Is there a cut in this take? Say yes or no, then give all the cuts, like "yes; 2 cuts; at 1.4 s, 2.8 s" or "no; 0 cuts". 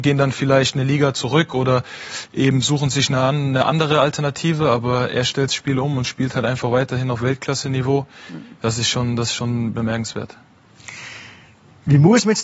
no; 0 cuts